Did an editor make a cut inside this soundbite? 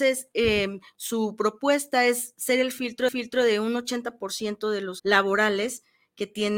yes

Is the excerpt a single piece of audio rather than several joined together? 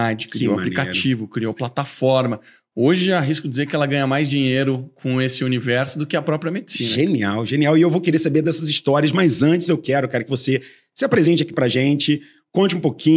yes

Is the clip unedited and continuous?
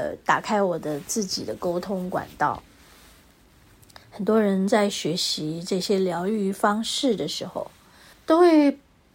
no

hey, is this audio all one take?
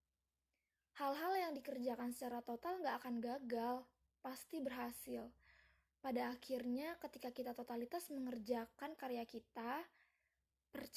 yes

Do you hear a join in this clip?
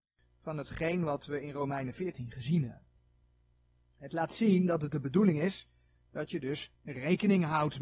no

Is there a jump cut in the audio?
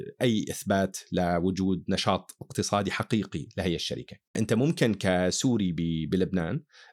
no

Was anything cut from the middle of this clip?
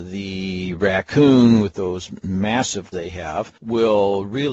yes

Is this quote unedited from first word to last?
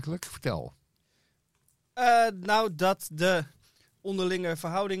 yes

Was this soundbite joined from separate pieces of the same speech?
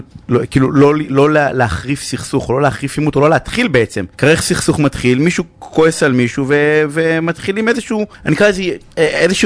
yes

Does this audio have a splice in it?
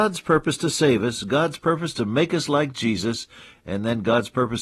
no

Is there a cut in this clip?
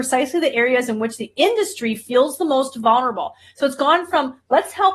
no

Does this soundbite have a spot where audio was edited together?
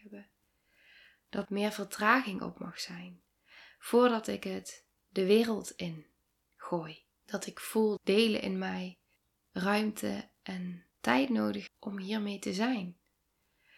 yes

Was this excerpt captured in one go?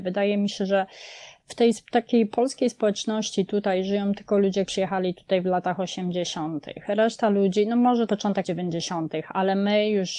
no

